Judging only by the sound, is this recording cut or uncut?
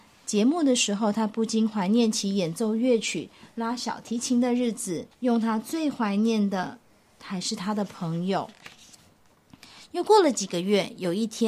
cut